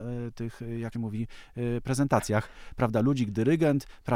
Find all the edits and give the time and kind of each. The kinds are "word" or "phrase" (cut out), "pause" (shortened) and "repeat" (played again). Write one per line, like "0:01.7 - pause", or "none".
0:00.9 - word